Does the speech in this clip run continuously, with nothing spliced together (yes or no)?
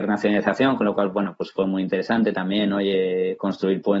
yes